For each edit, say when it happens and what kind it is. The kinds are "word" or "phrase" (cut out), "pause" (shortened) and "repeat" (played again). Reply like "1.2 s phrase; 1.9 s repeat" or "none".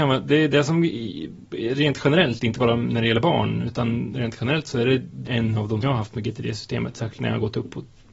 5.3 s word; 5.8 s phrase

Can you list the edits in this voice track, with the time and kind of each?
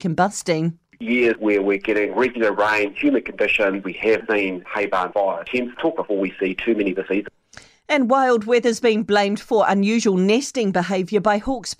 6.0 s phrase

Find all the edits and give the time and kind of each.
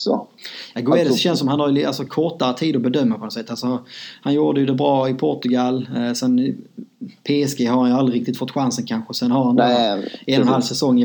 none

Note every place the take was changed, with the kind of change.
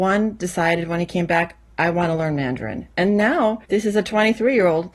3.6 s pause

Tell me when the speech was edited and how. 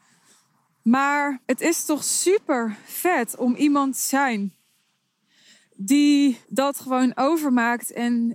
1.4 s pause; 6.4 s pause

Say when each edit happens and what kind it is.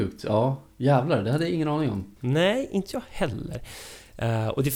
2.2 s pause

